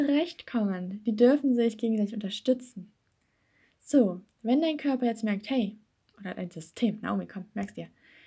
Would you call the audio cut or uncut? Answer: uncut